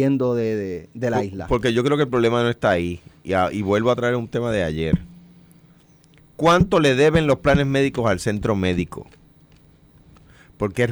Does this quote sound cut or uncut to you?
uncut